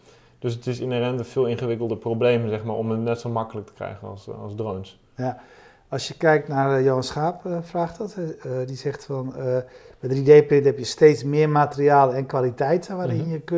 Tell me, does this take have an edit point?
no; 0 cuts

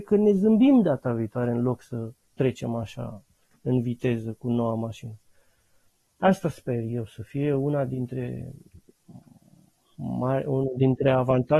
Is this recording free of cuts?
yes; 0 cuts

